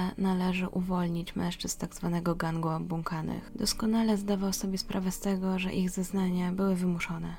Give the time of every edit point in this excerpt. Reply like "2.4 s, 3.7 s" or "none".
none